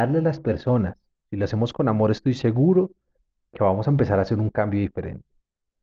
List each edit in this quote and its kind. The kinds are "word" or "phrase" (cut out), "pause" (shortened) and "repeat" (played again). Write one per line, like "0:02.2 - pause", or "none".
none